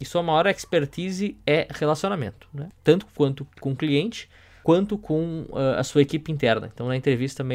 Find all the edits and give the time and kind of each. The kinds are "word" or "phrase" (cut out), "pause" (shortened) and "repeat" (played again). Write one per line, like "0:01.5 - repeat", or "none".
none